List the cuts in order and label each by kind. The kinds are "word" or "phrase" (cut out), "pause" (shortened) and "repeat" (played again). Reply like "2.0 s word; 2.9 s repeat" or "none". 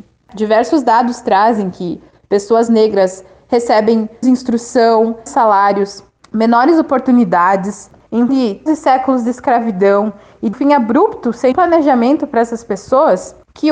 4.2 s word; 5.3 s word; 8.3 s word; 8.7 s word; 10.5 s word; 11.5 s word